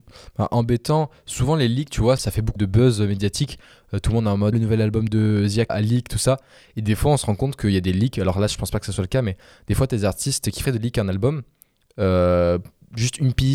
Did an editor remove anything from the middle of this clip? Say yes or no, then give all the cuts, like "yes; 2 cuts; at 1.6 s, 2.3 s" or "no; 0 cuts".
yes; 6 cuts; at 2.2 s, 2.6 s, 4.5 s, 5.1 s, 5.7 s, 10.6 s